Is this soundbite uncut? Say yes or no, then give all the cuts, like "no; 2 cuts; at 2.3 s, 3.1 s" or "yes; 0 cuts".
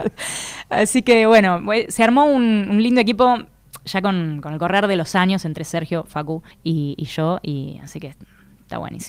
no; 1 cut; at 6.5 s